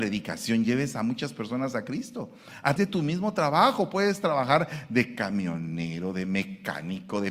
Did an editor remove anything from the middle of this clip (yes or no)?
yes